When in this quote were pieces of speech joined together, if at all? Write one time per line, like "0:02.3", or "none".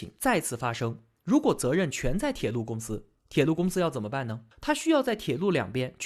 0:04.5